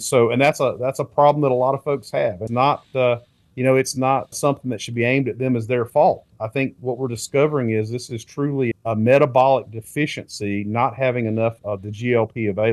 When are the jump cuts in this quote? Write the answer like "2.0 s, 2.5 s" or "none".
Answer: 2.5 s, 4.3 s, 8.7 s, 11.6 s